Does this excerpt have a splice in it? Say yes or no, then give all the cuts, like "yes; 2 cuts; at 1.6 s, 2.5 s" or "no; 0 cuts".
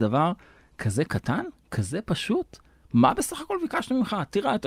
no; 0 cuts